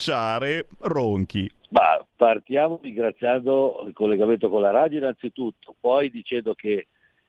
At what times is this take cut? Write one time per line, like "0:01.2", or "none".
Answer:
0:02.1